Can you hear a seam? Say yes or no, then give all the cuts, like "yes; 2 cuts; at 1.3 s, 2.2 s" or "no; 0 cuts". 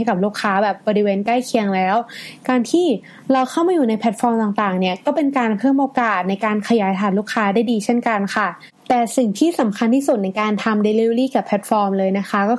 no; 0 cuts